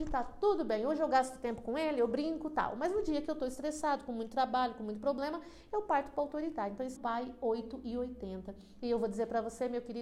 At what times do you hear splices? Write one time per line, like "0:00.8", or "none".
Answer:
0:07.0